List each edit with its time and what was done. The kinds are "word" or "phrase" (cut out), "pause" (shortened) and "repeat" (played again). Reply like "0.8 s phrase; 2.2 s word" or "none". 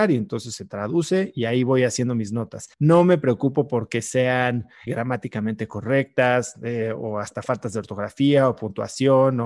2.7 s pause; 4.9 s word